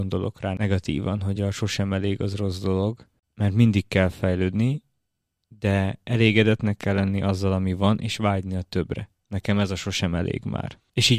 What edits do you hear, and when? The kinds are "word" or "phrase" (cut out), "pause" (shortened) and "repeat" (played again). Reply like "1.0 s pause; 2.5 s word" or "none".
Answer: none